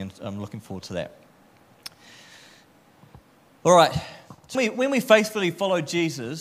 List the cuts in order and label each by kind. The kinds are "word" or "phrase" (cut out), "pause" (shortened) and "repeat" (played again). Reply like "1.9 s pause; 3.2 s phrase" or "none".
4.5 s word